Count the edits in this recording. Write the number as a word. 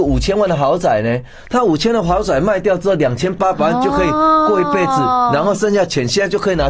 zero